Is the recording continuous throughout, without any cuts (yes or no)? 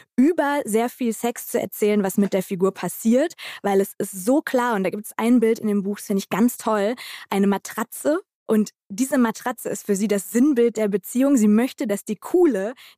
no